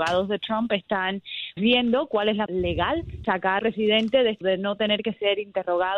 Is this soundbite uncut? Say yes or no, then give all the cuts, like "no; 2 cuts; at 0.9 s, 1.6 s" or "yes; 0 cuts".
no; 5 cuts; at 1.6 s, 2.5 s, 3.2 s, 3.6 s, 4.4 s